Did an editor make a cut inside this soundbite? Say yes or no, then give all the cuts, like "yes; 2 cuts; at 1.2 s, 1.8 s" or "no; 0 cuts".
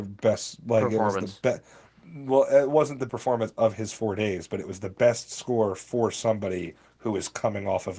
yes; 1 cut; at 3.1 s